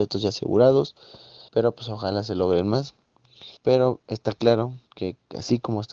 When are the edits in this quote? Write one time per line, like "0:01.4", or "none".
0:01.5
0:03.6
0:04.9